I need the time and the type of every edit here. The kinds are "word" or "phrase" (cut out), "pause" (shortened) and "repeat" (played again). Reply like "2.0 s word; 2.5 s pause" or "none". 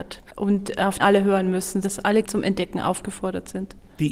1.0 s word; 1.8 s word; 2.2 s word